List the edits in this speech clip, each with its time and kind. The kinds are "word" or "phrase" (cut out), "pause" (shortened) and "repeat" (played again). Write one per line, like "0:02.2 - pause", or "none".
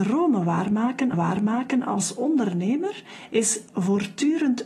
0:01.1 - repeat